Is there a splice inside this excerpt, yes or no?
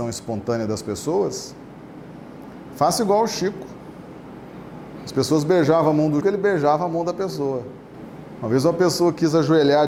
yes